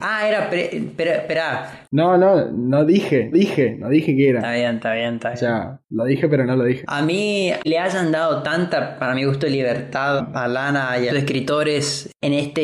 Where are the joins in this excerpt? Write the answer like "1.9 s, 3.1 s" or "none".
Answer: 3.3 s, 7.6 s, 10.2 s, 11.1 s